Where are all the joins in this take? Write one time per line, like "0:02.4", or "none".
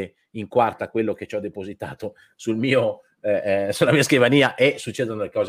none